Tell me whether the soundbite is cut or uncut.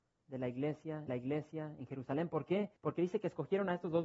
cut